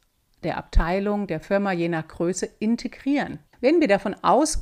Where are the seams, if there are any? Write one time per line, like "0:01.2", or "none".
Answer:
0:03.5